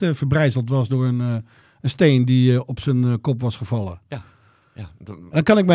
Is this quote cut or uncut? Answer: uncut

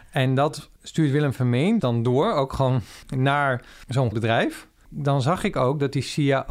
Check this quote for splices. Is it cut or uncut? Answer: cut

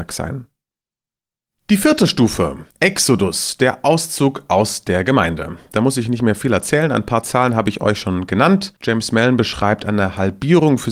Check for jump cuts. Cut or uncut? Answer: cut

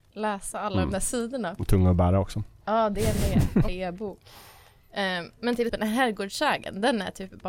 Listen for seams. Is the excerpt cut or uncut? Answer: cut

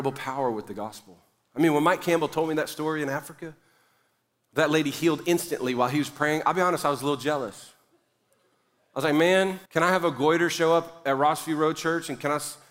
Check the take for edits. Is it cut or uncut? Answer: cut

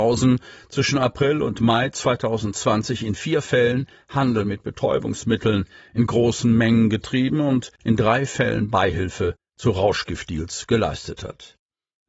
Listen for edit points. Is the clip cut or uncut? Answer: uncut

